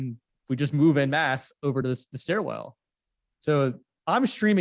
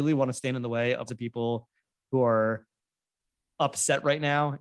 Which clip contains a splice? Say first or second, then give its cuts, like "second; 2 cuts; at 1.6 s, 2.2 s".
second; 1 cut; at 1.1 s